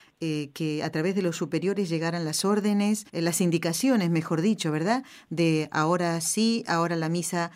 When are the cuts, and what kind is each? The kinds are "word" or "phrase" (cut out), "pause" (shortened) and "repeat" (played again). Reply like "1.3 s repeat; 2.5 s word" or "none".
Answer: 3.1 s pause